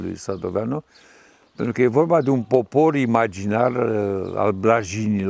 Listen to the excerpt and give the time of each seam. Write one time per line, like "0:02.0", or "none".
none

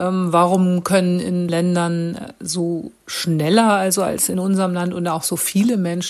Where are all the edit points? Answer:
0:01.5

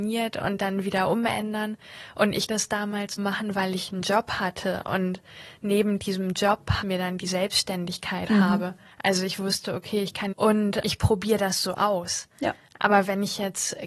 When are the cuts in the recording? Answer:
0:02.5
0:03.2
0:06.8
0:08.3
0:08.9
0:10.3
0:10.8

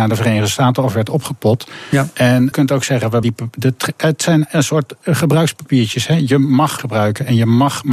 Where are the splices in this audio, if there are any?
0:02.5
0:03.2
0:06.8

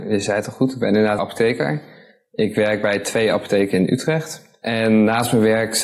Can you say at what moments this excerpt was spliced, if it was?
0:01.2

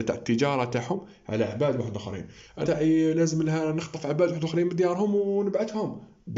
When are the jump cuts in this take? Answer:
0:02.7

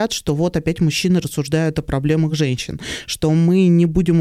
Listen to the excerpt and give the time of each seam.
none

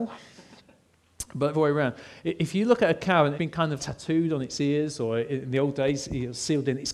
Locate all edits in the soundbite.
0:01.5
0:03.3
0:03.8

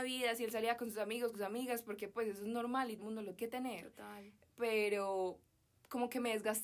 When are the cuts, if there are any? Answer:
0:01.3
0:03.0
0:03.4

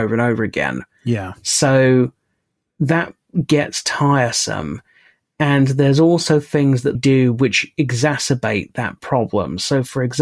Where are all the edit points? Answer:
0:06.9

